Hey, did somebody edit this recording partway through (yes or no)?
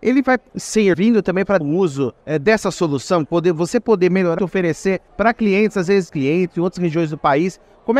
yes